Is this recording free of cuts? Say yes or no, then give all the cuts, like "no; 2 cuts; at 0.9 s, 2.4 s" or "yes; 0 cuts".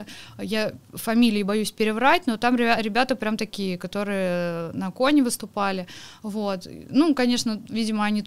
yes; 0 cuts